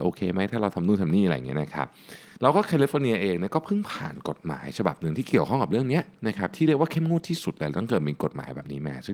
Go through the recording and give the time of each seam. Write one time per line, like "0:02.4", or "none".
0:02.4